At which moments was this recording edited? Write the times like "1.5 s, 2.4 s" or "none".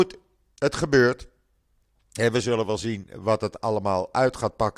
none